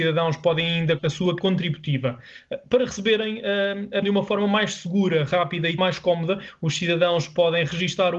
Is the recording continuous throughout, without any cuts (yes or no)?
no